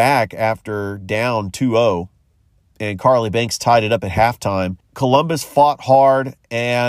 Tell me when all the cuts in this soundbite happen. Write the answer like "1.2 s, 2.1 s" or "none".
none